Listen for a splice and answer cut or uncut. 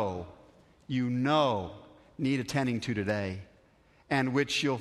uncut